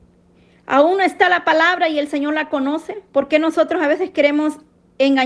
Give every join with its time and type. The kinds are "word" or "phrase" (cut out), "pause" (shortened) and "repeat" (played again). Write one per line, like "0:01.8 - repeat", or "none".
none